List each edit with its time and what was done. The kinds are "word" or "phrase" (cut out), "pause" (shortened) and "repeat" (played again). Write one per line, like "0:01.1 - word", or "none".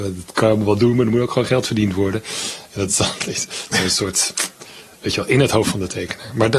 none